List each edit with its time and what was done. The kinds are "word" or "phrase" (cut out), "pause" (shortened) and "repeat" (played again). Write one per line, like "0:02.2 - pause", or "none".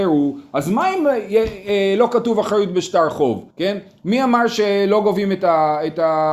0:03.5 - pause